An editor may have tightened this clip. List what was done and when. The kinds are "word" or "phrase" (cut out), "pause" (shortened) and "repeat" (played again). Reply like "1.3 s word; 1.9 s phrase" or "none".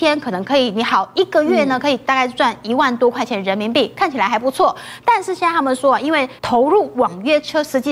6.4 s pause